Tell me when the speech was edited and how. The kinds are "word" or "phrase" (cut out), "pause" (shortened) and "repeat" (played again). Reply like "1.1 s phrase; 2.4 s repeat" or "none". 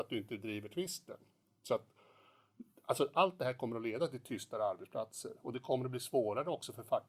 none